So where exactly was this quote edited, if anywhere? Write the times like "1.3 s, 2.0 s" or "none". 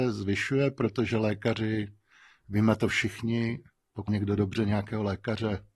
4.1 s